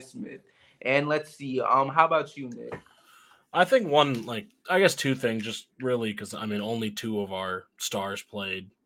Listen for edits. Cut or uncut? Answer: uncut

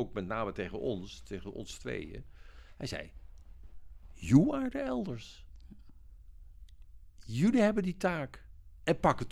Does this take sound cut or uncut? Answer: uncut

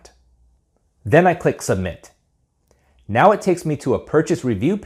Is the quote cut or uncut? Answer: uncut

